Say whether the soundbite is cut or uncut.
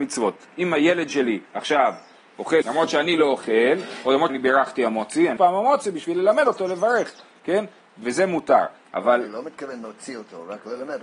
cut